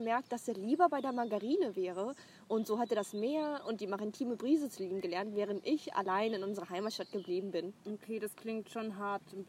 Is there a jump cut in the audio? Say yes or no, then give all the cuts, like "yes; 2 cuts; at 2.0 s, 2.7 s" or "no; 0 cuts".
yes; 1 cut; at 7.8 s